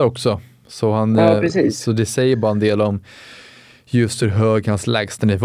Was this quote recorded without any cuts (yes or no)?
yes